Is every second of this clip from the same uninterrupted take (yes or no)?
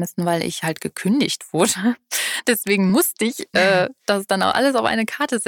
yes